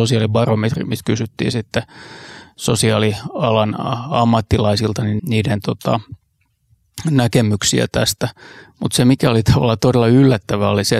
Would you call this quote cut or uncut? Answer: cut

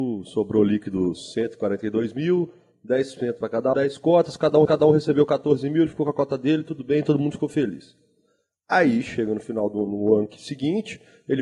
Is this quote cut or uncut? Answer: cut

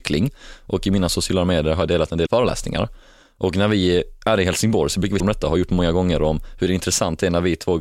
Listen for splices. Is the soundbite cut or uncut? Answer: cut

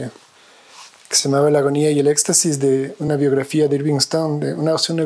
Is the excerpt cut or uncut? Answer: uncut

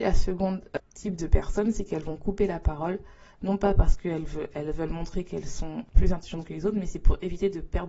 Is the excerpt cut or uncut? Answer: uncut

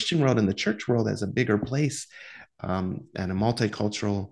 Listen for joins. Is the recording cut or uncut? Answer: uncut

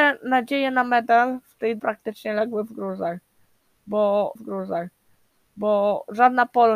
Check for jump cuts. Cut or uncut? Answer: cut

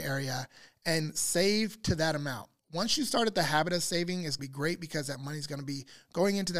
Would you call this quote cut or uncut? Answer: cut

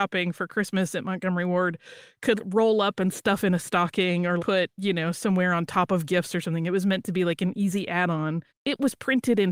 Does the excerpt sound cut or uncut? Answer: cut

